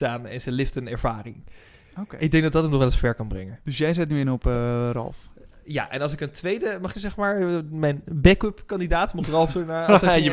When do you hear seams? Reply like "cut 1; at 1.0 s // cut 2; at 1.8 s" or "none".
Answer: cut 1; at 6.9 s